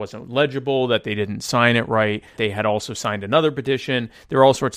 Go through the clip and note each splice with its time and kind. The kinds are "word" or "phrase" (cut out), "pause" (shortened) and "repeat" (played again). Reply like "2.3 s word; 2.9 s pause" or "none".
2.4 s word

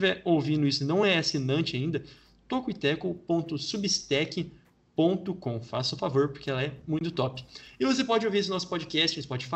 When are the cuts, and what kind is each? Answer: none

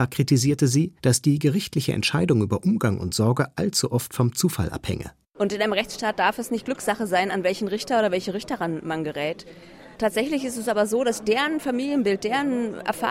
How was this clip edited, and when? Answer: 1.0 s pause; 9.9 s pause

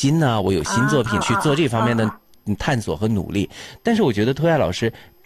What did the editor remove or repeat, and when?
1.2 s word

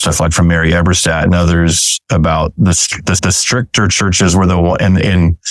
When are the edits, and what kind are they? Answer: 3.2 s repeat

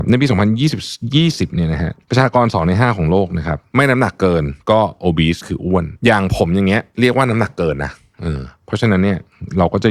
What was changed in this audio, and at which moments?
none

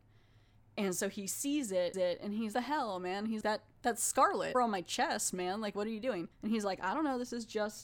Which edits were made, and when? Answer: 1.9 s repeat; 2.5 s phrase; 3.4 s word; 4.5 s phrase; 6.3 s pause

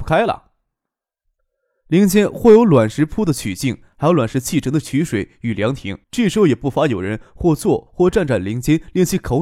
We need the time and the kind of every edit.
6.0 s pause

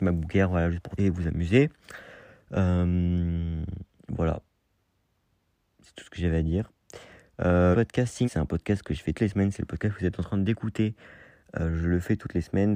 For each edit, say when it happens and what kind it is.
1.0 s word; 7.7 s word; 8.2 s word; 9.1 s word

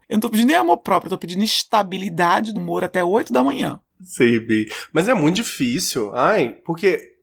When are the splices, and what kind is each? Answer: 2.5 s word

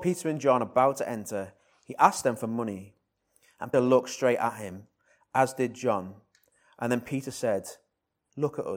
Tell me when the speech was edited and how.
3.7 s word

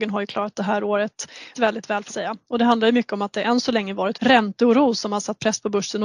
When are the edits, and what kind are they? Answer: 1.5 s word; 2.1 s word; 4.1 s word

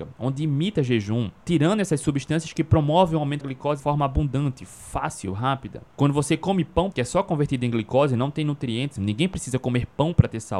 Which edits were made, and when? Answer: 1.4 s pause; 3.4 s word; 3.8 s word; 5.9 s pause; 6.9 s phrase; 9.0 s word

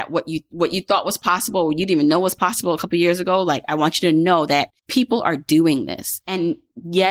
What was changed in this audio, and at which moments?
4.8 s pause

